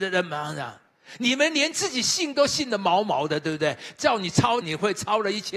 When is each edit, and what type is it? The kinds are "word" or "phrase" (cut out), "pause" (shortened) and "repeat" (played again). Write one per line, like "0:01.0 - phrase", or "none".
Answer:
0:04.6 - phrase

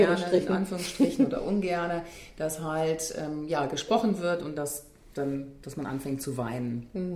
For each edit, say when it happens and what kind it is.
none

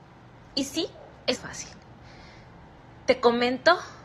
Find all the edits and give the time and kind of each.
0:01.4 - phrase

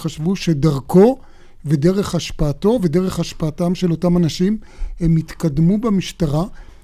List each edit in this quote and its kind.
none

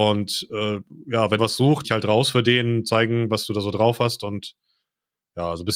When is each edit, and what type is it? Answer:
0:01.4 - phrase
0:01.8 - phrase

